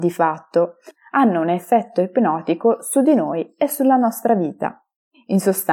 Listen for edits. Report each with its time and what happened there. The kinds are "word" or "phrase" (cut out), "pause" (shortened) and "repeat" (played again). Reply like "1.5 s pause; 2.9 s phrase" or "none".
none

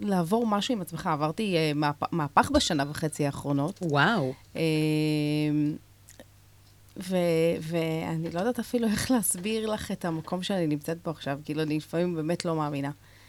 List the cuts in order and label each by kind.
none

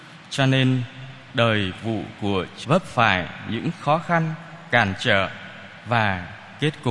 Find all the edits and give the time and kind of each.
1.8 s word; 2.6 s word

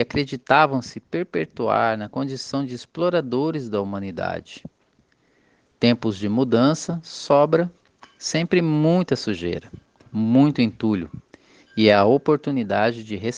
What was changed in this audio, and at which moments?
none

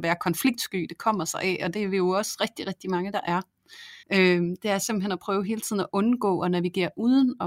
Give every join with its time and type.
4.0 s pause

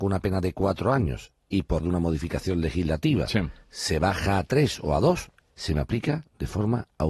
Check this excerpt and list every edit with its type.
1.8 s word

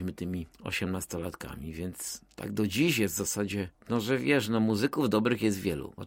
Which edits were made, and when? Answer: none

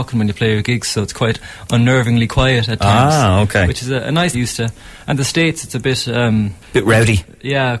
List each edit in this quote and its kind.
4.3 s phrase; 5.1 s word; 6.6 s pause

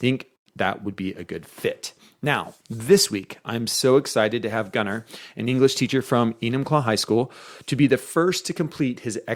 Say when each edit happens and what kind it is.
2.6 s pause

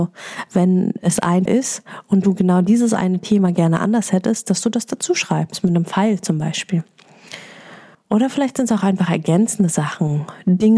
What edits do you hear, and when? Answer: 1.5 s word; 7.9 s pause

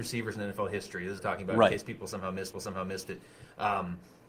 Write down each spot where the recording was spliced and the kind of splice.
1.2 s phrase; 2.5 s repeat

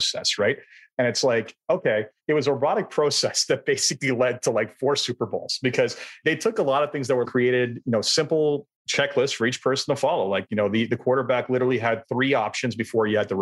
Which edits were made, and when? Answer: 7.3 s phrase; 8.8 s pause

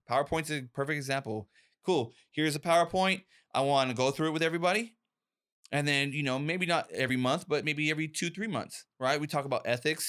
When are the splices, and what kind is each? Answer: none

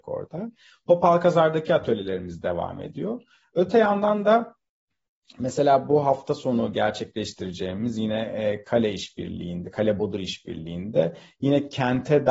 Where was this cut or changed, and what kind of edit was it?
none

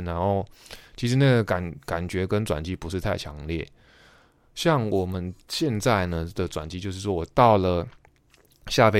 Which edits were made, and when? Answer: 5.4 s pause

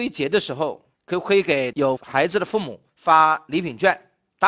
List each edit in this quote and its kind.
0.9 s pause; 2.9 s pause

